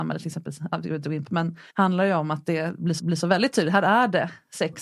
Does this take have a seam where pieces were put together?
yes; 3 cuts; at 1.2 s, 1.7 s, 3.0 s

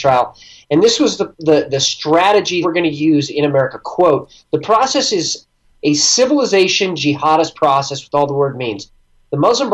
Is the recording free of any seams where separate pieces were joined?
no; 1 cut; at 2.6 s

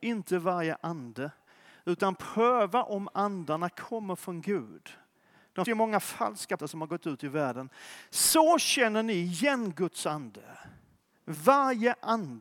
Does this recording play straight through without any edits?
no; 2 cuts; at 5.7 s, 6.6 s

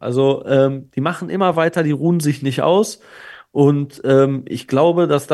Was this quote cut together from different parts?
no; 0 cuts

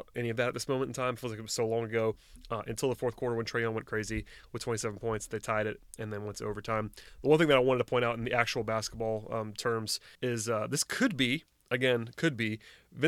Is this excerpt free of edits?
no; 1 cut; at 10.1 s

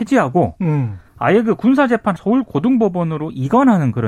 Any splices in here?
yes; 2 cuts; at 1.1 s, 2.2 s

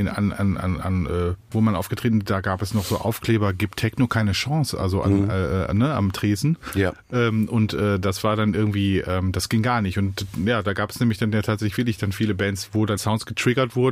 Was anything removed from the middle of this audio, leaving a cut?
yes; 2 cuts; at 1.5 s, 13.0 s

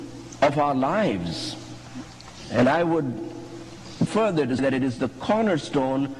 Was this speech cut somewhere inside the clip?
yes; 2 cuts; at 4.1 s, 4.6 s

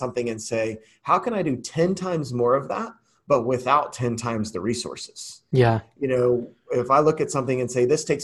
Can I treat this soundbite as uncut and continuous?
yes; 0 cuts

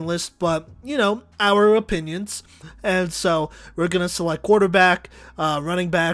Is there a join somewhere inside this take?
yes; 1 cut; at 1.3 s

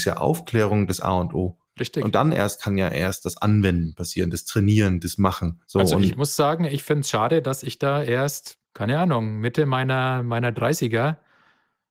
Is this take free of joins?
no; 2 cuts; at 1.7 s, 8.6 s

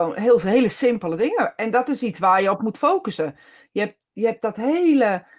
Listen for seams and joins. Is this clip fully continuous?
yes; 0 cuts

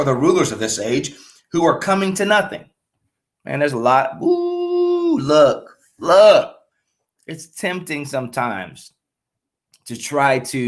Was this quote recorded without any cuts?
yes; 0 cuts

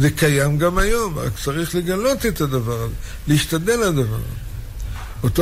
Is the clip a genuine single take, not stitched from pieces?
yes; 0 cuts

